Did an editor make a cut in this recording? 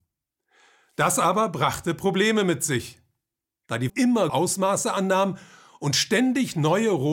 yes; 2 cuts; at 3.9 s, 4.3 s

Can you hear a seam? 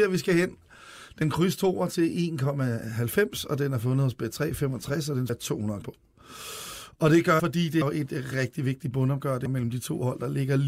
yes; 7 cuts; at 1.2 s, 5.3 s, 5.8 s, 7.4 s, 7.8 s, 8.3 s, 9.5 s

